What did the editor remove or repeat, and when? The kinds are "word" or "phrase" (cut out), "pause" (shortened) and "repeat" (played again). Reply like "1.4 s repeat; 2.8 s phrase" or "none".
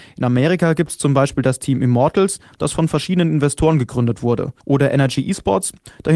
4.6 s pause